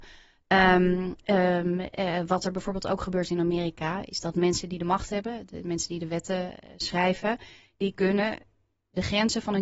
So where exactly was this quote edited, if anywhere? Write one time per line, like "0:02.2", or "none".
none